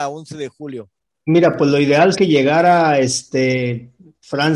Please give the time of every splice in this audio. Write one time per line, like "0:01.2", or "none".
0:02.1